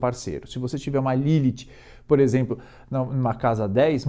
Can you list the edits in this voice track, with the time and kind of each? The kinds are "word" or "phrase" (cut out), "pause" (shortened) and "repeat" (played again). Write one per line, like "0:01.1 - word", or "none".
none